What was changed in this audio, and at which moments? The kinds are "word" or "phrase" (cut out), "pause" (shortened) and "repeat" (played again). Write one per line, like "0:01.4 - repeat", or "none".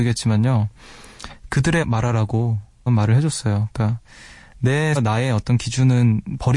0:01.8 - word
0:02.9 - word
0:05.0 - word